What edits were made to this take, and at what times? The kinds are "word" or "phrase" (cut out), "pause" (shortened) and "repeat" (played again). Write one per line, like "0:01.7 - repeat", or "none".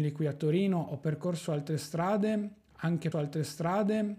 0:03.1 - repeat